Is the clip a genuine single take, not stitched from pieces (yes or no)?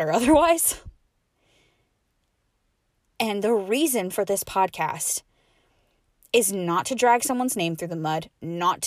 yes